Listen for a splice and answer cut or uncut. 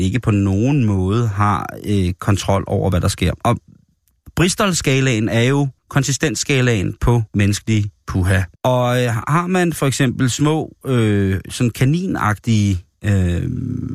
cut